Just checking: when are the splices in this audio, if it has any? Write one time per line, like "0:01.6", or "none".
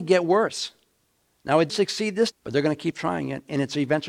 0:01.7
0:02.3